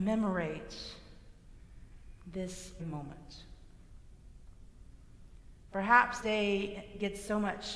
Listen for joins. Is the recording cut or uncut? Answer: cut